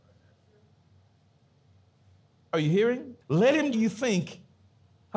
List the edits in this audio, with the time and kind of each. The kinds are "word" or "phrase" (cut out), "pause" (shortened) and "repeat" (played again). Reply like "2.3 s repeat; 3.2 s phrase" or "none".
3.2 s pause; 3.7 s phrase